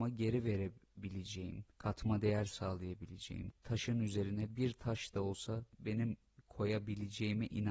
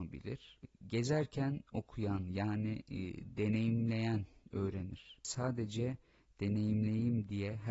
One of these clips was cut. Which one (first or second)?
first